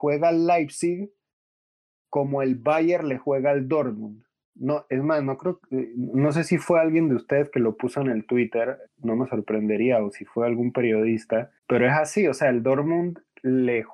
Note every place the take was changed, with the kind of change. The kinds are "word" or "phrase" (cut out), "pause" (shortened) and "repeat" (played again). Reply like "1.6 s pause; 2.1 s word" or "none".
8.9 s word; 11.6 s pause